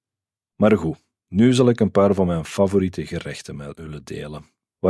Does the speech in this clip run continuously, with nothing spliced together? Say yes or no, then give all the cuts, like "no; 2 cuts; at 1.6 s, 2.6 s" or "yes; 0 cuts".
yes; 0 cuts